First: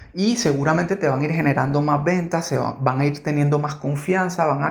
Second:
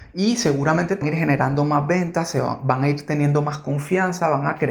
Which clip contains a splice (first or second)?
second